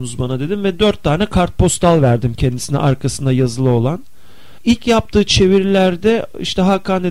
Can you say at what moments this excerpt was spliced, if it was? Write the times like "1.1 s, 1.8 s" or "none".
none